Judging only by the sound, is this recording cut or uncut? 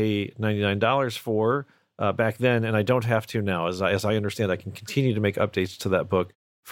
uncut